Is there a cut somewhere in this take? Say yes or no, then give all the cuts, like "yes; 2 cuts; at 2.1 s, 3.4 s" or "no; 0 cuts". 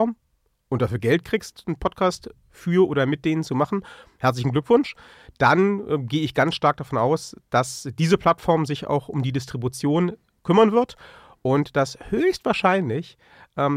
no; 0 cuts